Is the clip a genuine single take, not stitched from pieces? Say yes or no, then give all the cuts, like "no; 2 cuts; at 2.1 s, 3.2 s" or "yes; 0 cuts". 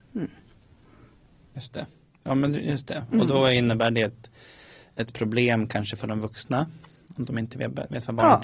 yes; 0 cuts